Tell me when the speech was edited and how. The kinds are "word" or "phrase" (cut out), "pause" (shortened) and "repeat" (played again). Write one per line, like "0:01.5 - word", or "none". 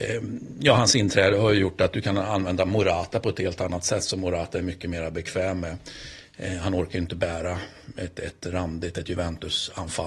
none